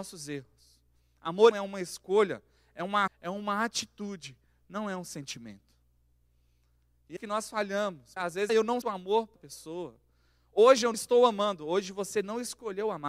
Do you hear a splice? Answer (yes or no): yes